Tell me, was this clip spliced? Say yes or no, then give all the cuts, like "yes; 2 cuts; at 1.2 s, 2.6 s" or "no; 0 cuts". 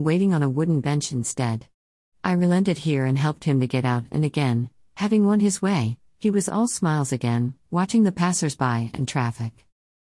no; 0 cuts